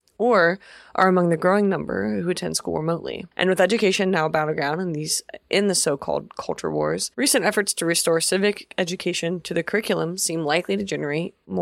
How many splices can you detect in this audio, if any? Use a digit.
2